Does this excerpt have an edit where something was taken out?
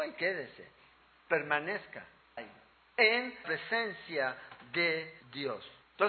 yes; 2 cuts; at 2.4 s, 3.4 s

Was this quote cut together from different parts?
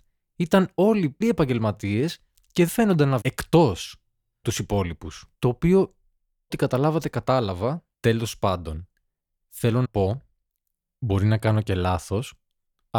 yes; 8 cuts; at 1.2 s, 2.7 s, 3.2 s, 4.4 s, 5.3 s, 6.5 s, 7.9 s, 9.8 s

